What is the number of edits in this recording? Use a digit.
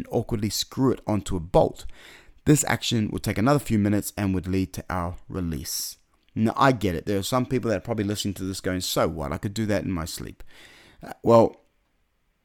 0